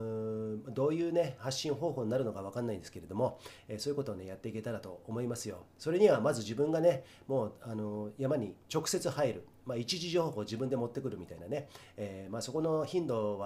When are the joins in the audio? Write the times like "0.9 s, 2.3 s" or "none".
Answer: 8.6 s